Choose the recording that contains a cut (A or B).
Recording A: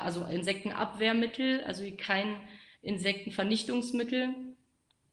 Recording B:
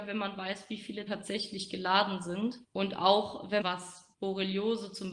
B